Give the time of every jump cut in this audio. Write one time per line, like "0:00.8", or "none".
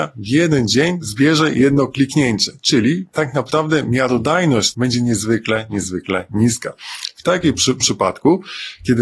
0:04.7
0:07.8